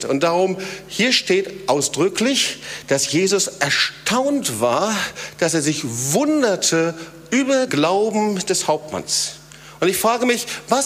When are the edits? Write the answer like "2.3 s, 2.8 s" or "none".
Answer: 7.7 s